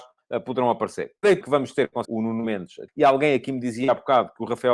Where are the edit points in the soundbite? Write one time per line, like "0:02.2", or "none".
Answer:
0:01.4
0:02.0
0:02.9